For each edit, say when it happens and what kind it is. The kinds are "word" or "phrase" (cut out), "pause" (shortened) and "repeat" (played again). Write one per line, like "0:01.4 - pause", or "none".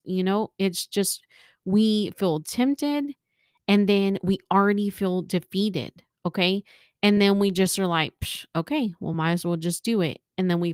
none